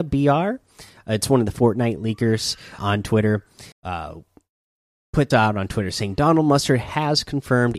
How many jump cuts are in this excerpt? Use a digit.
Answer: 3